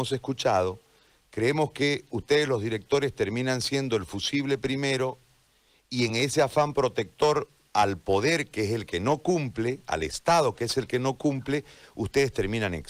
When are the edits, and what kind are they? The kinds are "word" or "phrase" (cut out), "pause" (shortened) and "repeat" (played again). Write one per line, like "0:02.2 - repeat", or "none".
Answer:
none